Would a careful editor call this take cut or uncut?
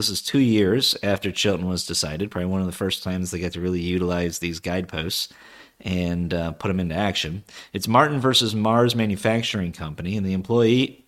uncut